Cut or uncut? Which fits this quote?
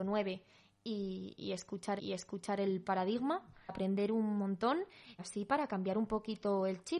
cut